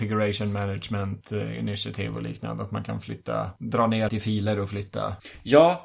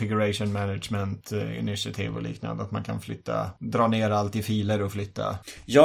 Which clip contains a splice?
first; 1 cut; at 4.1 s

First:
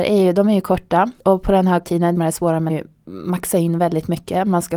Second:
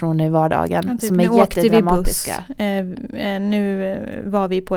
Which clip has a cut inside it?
first; 4 cuts; at 1.2 s, 1.8 s, 2.2 s, 2.7 s

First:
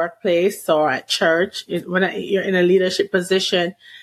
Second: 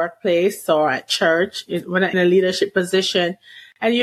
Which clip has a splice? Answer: second; 1 cut; at 2.1 s

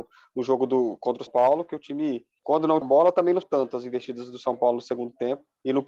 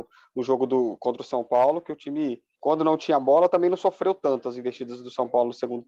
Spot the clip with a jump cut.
first; 3 cuts; at 1.3 s, 2.8 s, 3.4 s

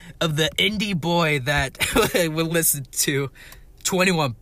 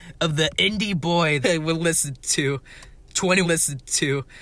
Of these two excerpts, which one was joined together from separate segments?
second; 2 cuts; at 1.4 s, 3.4 s

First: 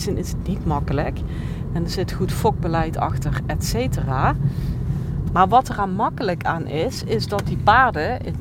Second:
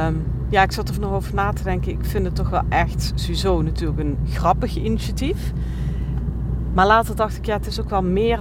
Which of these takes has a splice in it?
second; 1 cut; at 0.9 s

